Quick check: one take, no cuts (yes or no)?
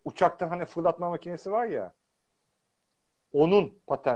yes